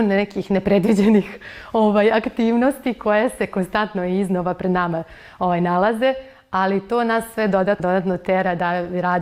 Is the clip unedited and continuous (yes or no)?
no